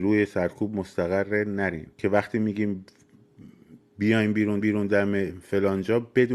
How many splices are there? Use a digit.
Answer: 2